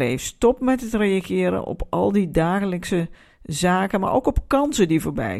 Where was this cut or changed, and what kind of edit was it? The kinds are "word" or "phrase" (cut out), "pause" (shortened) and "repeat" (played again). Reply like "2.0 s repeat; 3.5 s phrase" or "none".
none